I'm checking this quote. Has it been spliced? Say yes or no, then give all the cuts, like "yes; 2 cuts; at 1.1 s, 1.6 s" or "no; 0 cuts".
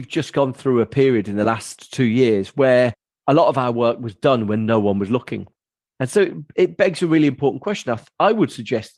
no; 0 cuts